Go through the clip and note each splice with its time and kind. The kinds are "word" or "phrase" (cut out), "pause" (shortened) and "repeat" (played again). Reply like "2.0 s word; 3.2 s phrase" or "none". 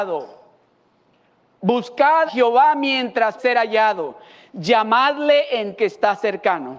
2.3 s word; 3.4 s word; 5.8 s word